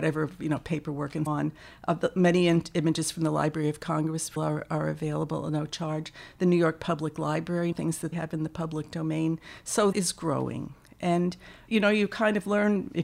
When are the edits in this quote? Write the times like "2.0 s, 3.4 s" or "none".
1.3 s, 4.4 s, 7.7 s, 8.1 s, 9.9 s, 11.7 s